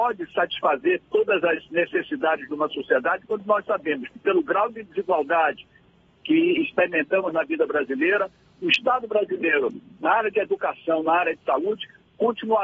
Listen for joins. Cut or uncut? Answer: uncut